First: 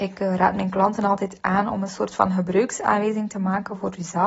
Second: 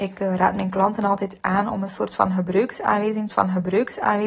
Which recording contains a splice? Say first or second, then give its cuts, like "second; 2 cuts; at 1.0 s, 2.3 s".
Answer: second; 1 cut; at 3.3 s